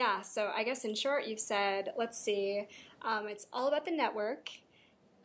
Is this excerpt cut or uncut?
uncut